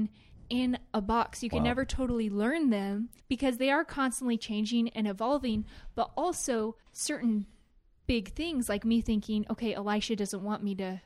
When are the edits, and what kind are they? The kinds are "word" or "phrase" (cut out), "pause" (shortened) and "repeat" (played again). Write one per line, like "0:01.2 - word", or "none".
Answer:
0:03.2 - pause
0:06.8 - pause